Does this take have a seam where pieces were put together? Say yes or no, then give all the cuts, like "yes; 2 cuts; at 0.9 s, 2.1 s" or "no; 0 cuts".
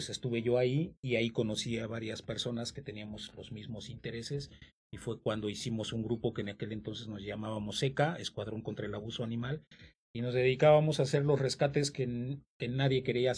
no; 0 cuts